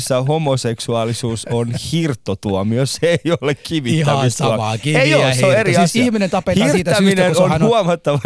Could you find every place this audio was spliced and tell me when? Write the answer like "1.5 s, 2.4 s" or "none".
none